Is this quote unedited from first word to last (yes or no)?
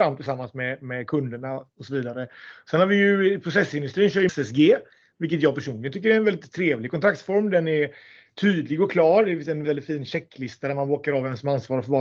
no